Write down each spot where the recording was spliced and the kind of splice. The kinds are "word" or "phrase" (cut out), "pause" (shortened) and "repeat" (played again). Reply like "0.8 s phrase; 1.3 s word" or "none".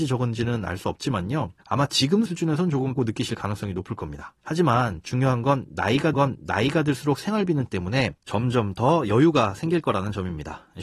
1.6 s pause; 2.3 s word; 3.0 s word; 4.4 s pause; 6.1 s repeat; 7.7 s word; 8.2 s pause